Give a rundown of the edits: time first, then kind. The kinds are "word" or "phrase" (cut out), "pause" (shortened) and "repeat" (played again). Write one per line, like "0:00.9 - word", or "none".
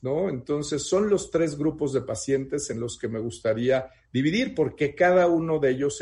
none